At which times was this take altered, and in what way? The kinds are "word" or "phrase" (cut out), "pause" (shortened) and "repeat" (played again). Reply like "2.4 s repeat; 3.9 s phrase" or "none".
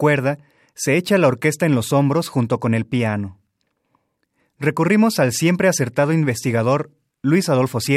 none